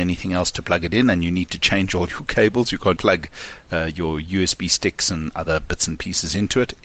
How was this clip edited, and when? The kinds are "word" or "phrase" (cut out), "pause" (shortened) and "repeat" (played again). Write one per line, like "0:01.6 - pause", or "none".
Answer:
0:03.0 - word